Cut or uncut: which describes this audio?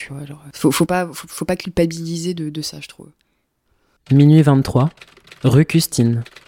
uncut